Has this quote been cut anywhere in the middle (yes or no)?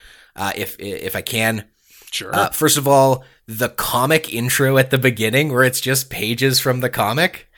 no